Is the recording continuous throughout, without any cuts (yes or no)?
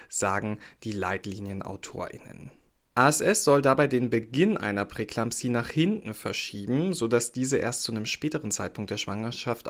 no